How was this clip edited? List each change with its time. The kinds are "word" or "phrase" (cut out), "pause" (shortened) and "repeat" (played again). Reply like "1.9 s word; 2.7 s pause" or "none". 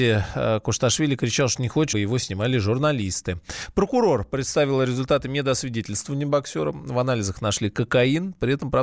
1.9 s word